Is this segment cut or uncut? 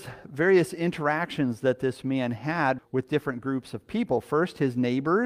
cut